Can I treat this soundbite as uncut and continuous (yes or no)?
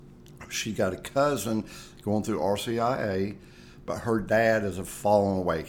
yes